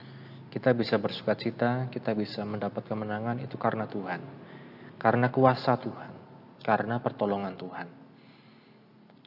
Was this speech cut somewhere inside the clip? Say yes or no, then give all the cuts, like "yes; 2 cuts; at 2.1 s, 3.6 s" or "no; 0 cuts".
no; 0 cuts